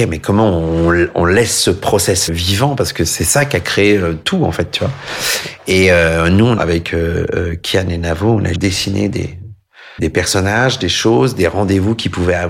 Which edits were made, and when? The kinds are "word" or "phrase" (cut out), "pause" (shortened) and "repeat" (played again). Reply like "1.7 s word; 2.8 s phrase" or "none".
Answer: 2.3 s word; 6.6 s word; 8.5 s word; 10.0 s word